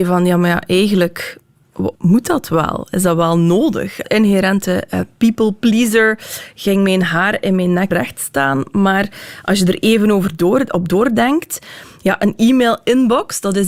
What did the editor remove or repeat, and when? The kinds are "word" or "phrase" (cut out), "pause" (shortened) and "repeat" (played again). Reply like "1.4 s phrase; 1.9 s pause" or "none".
2.0 s pause; 4.0 s phrase; 7.9 s word